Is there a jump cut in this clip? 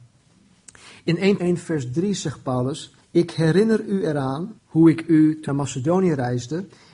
yes; 4 cuts; at 1.4 s, 3.0 s, 4.6 s, 5.5 s

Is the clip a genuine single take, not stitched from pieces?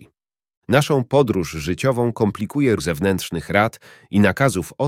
no; 1 cut; at 2.8 s

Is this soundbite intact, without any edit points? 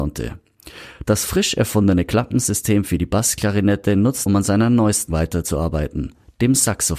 no; 2 cuts; at 4.3 s, 5.1 s

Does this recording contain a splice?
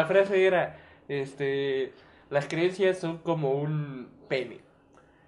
no; 0 cuts

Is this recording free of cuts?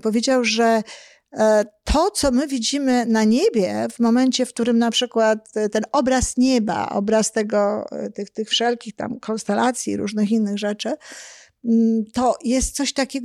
yes; 0 cuts

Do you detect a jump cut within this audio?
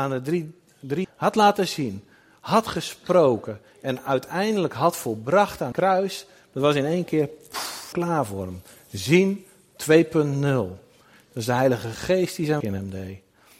yes; 4 cuts; at 1.0 s, 5.7 s, 7.9 s, 12.6 s

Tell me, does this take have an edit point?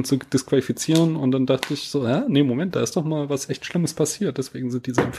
no; 0 cuts

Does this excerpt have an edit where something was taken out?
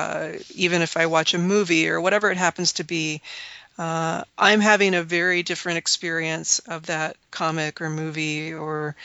yes; 2 cuts; at 4.3 s, 7.3 s

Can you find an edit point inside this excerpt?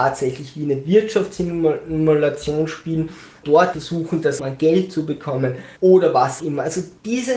yes; 5 cuts; at 3.4 s, 3.7 s, 4.4 s, 5.8 s, 6.4 s

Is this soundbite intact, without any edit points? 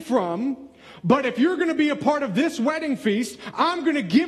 yes; 0 cuts

